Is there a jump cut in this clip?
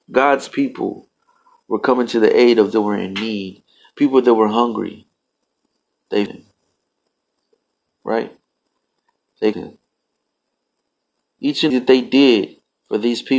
yes; 4 cuts; at 2.7 s, 6.3 s, 9.5 s, 11.7 s

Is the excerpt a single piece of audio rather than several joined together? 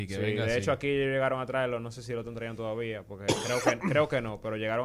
yes; 0 cuts

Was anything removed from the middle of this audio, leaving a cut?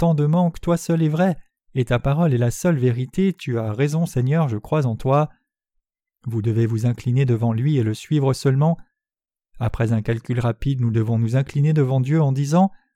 no; 0 cuts

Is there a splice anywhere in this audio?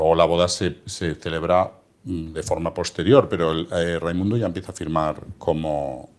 no; 0 cuts

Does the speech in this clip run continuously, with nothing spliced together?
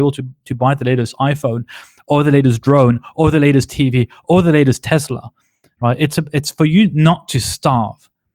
yes; 0 cuts

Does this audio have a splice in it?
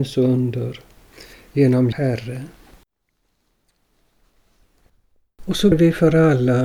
yes; 2 cuts; at 1.9 s, 5.7 s

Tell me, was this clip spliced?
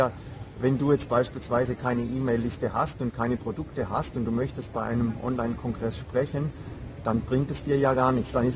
yes; 1 cut; at 1.8 s

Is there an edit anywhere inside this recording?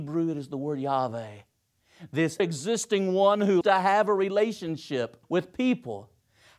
yes; 3 cuts; at 2.4 s, 3.6 s, 5.2 s

